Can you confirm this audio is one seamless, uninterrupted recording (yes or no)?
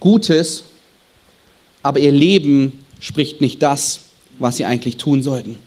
yes